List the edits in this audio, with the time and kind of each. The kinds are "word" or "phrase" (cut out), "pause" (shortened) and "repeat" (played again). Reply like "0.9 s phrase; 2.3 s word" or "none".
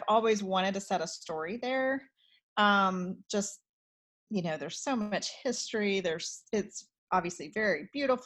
none